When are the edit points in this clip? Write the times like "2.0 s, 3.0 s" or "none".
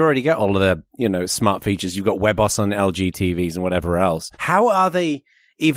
4.3 s